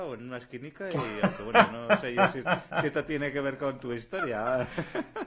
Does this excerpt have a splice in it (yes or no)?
no